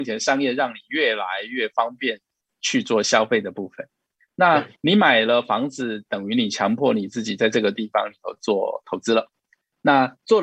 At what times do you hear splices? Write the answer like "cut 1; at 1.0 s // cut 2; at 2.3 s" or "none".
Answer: cut 1; at 4.8 s